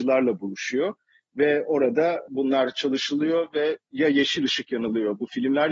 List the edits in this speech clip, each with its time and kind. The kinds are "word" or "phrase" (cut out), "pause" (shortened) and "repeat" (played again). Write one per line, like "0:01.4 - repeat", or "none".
none